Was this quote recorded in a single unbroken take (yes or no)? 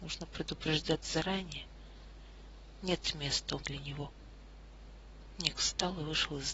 no